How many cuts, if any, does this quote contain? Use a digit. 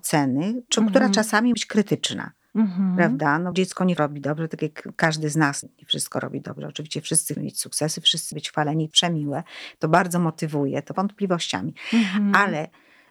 8